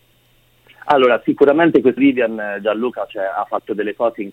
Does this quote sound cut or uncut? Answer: cut